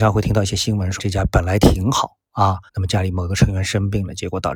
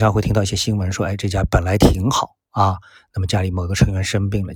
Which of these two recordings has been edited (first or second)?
first